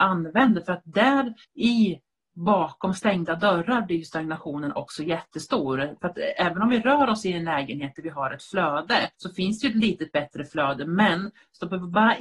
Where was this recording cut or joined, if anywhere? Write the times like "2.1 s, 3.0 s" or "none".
1.4 s, 9.1 s